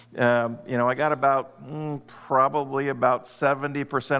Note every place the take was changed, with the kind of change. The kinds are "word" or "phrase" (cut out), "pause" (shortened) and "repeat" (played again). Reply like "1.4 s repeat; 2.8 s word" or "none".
none